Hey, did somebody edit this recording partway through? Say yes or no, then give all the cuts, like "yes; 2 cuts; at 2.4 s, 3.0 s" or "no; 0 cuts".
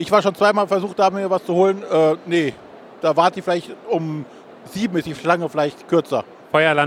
no; 0 cuts